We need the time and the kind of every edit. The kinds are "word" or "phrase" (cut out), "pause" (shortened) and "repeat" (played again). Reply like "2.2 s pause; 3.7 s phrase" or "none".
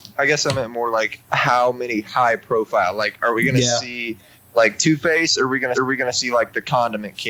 1.2 s pause; 5.7 s repeat